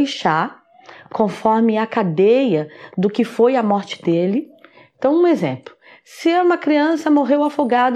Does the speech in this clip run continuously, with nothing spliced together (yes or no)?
yes